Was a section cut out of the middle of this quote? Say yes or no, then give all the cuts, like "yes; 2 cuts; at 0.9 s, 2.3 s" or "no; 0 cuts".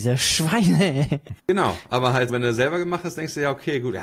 yes; 2 cuts; at 1.4 s, 2.3 s